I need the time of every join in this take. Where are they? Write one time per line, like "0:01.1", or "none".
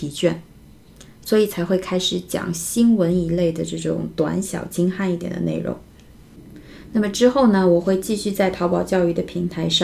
none